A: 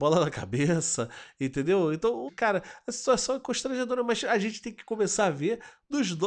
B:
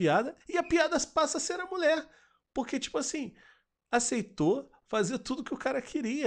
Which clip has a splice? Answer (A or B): A